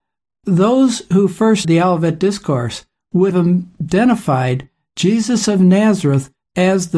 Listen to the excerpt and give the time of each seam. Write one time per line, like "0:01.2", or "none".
0:01.6
0:03.3